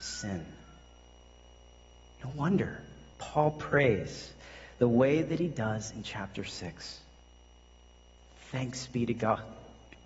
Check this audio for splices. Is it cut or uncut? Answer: uncut